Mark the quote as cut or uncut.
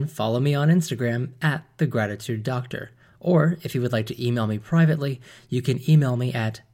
uncut